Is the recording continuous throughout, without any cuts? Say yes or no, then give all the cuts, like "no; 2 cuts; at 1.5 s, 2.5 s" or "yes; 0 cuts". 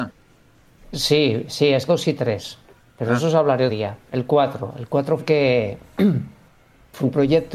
no; 3 cuts; at 1.9 s, 3.7 s, 5.2 s